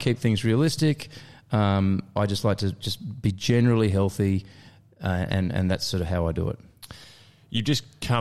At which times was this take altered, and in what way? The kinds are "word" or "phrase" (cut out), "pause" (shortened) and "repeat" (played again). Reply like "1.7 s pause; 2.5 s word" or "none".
none